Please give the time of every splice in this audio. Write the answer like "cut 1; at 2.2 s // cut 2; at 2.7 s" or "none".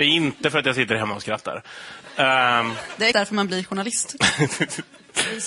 cut 1; at 3.1 s